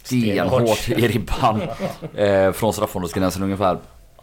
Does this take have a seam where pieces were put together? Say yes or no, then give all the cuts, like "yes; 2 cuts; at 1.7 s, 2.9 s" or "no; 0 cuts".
no; 0 cuts